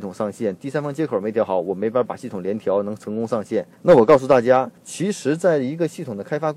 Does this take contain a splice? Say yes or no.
yes